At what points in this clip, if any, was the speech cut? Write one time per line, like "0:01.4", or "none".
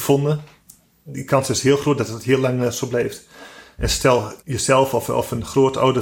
0:04.4